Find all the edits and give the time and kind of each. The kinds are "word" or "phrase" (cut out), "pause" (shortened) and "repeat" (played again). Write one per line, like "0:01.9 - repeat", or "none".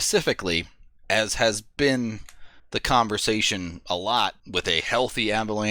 0:01.0 - pause
0:02.6 - pause
0:04.4 - pause

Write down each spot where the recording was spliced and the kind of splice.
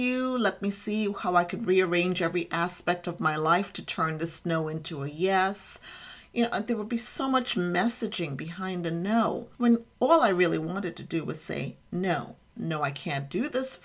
0:09.5 - pause

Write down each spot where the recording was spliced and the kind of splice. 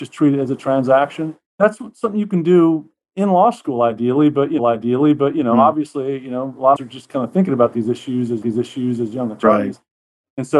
0:01.5 - pause
0:04.6 - repeat
0:06.8 - phrase
0:08.4 - repeat

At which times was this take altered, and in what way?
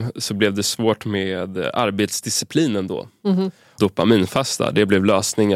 0:03.8 - word

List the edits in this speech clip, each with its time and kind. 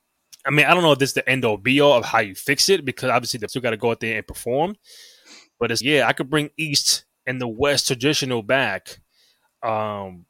0:03.5 - word
0:05.8 - word

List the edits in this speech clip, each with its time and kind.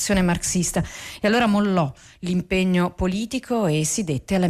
none

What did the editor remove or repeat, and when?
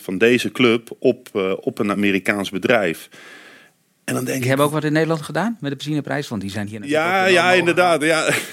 none

